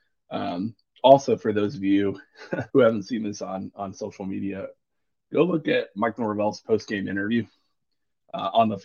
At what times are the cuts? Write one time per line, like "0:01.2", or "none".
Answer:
0:02.7